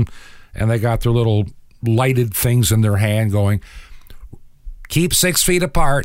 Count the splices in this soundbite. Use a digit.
0